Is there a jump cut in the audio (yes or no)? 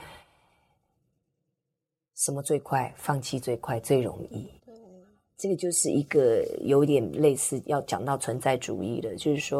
yes